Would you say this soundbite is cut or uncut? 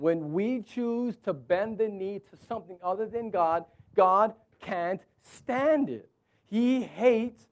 uncut